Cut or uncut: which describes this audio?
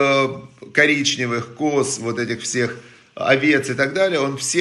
uncut